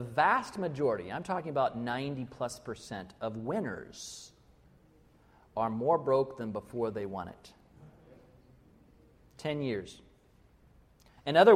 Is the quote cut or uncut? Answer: uncut